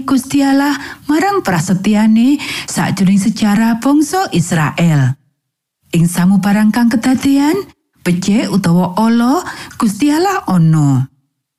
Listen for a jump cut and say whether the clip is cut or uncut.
uncut